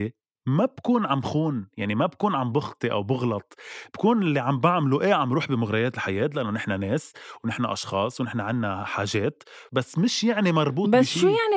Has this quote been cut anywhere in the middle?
yes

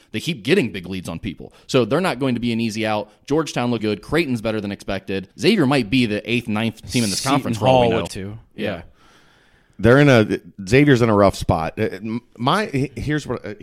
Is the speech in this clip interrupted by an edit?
yes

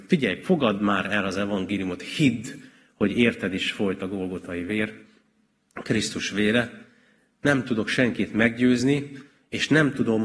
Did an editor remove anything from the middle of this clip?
no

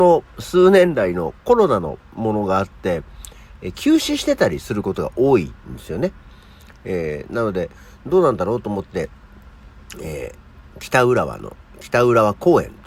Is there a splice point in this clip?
no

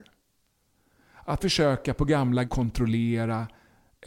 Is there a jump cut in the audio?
yes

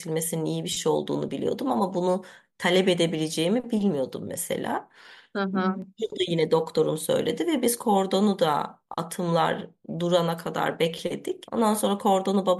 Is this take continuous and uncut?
yes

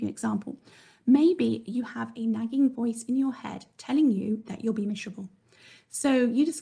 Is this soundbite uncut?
yes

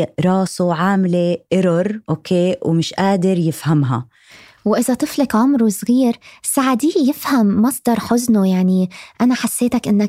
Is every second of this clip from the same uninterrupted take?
no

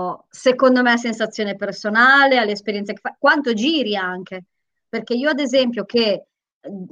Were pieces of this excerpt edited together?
no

